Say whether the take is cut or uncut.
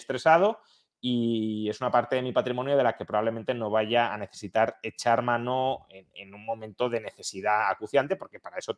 uncut